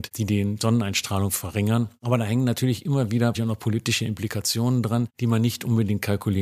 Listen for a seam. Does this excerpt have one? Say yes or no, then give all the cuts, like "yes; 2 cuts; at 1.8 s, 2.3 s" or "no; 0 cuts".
yes; 1 cut; at 3.3 s